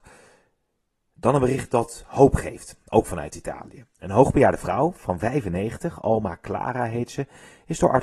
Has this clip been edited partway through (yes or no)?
no